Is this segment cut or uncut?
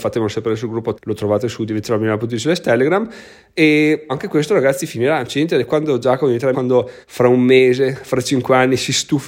cut